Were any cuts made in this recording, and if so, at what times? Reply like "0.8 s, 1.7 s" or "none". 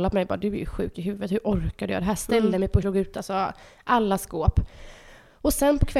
2.8 s